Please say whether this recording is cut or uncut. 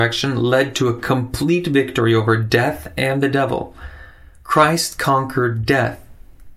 uncut